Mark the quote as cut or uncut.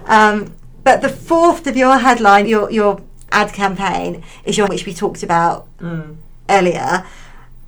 cut